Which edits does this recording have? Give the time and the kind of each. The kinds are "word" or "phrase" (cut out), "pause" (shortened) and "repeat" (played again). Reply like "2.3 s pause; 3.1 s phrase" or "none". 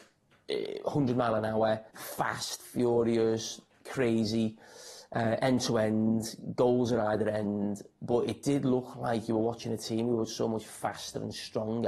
1.9 s pause